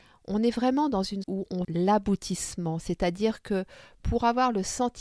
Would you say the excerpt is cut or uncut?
cut